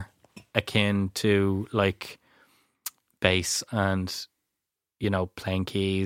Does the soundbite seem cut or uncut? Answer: uncut